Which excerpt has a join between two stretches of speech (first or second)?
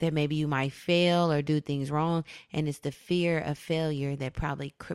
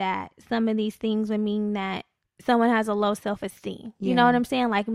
second